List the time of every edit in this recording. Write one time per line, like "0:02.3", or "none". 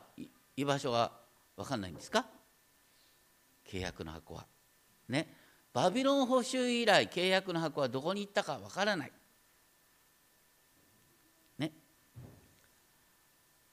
none